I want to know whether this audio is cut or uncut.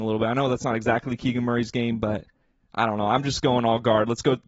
uncut